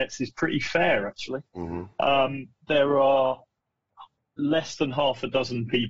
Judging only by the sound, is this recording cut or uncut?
uncut